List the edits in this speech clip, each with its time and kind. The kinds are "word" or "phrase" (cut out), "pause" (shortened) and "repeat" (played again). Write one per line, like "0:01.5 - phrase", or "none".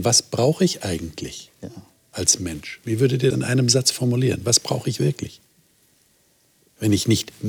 0:02.0 - pause
0:03.3 - word